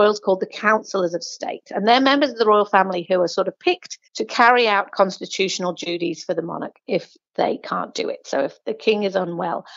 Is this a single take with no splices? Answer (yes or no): no